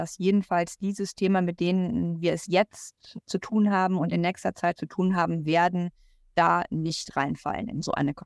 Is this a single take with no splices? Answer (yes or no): yes